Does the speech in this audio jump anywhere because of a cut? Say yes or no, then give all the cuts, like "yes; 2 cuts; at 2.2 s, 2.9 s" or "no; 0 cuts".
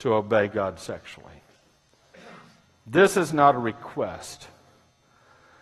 no; 0 cuts